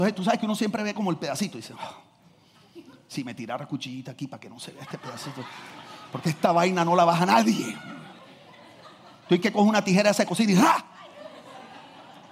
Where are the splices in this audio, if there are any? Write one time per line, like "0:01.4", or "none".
none